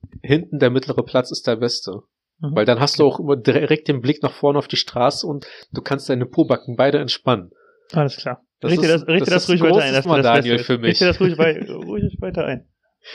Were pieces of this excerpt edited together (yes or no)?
yes